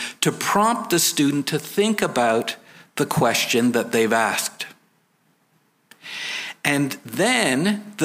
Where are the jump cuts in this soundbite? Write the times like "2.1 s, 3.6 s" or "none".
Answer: none